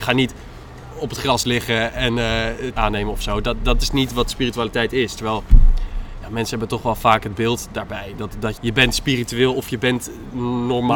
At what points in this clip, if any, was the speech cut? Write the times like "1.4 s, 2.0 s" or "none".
2.8 s, 8.6 s